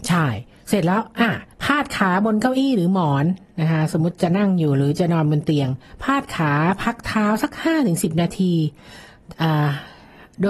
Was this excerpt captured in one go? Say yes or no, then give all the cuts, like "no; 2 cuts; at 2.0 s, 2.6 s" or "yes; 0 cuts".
no; 1 cut; at 1.5 s